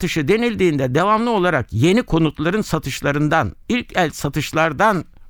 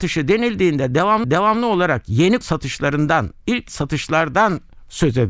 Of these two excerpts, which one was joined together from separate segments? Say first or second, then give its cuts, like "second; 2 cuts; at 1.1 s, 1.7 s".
second; 3 cuts; at 1.2 s, 2.4 s, 3.7 s